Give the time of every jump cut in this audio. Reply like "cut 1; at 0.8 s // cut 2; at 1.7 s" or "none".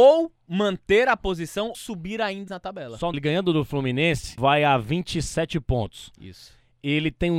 cut 1; at 1.7 s // cut 2; at 2.5 s // cut 3; at 3.1 s // cut 4; at 4.4 s